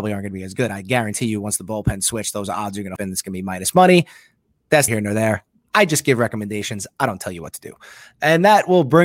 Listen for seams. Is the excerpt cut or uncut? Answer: cut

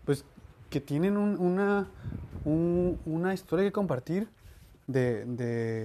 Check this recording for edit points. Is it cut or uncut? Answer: uncut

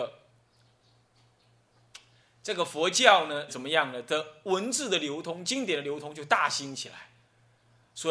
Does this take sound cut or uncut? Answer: cut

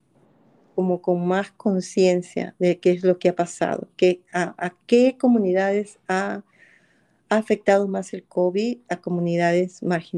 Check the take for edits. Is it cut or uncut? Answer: uncut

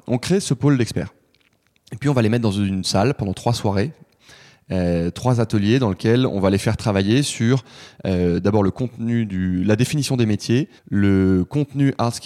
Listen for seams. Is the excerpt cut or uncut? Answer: cut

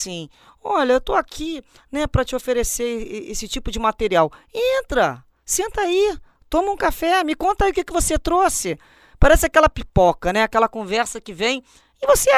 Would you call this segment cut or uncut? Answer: uncut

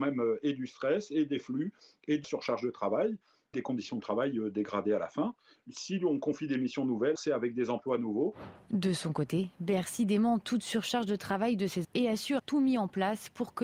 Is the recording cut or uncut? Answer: cut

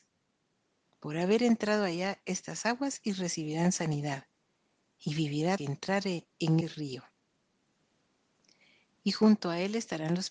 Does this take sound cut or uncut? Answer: cut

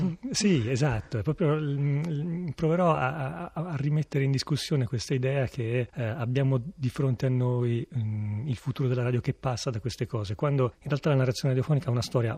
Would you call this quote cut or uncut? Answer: uncut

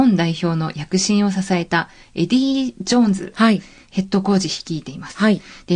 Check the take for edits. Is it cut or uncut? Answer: uncut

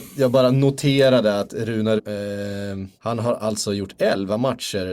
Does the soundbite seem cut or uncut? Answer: cut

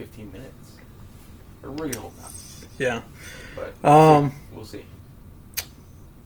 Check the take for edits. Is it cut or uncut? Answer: cut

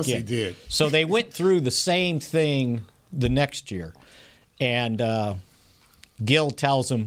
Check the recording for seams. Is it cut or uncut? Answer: uncut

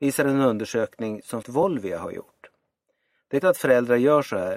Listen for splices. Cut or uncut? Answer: cut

